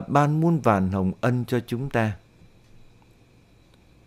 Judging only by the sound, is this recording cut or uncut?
uncut